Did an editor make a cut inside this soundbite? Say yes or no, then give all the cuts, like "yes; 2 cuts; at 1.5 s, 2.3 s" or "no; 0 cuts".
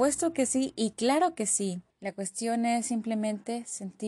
yes; 1 cut; at 1.9 s